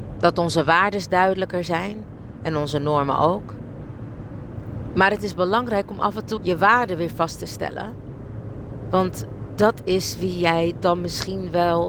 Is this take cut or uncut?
cut